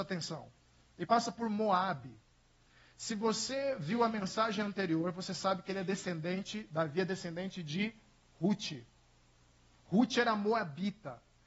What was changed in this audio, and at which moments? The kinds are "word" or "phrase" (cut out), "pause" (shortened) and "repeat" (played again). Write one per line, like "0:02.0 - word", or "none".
none